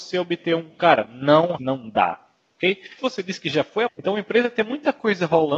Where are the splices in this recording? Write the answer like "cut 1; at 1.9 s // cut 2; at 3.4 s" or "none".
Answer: cut 1; at 1.6 s // cut 2; at 3.0 s // cut 3; at 3.9 s